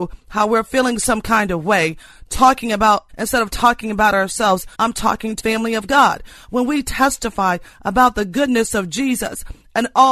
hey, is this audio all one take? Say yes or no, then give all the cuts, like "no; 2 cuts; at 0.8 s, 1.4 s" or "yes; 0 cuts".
no; 3 cuts; at 3.1 s, 4.7 s, 5.4 s